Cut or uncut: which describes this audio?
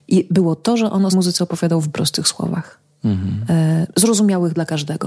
cut